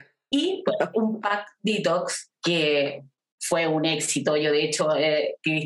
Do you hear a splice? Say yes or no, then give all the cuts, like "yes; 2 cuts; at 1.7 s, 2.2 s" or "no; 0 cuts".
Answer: yes; 1 cut; at 0.9 s